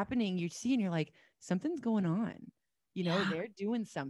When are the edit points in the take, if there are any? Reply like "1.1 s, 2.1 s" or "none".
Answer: none